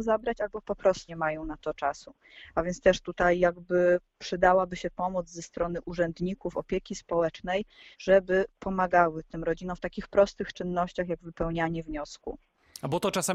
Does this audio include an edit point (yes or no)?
yes